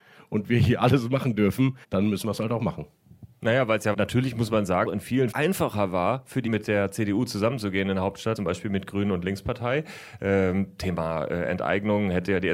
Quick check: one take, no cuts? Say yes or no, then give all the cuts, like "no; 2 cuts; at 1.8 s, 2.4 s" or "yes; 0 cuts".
no; 6 cuts; at 1.8 s, 3.9 s, 4.8 s, 5.3 s, 6.5 s, 8.4 s